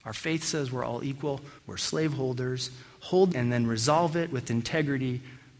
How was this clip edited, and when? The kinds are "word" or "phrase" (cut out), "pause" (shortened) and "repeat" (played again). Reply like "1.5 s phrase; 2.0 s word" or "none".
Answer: 1.6 s pause; 3.3 s phrase